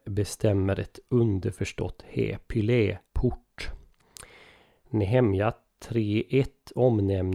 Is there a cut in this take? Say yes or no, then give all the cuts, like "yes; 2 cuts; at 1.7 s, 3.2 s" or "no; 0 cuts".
yes; 1 cut; at 3.1 s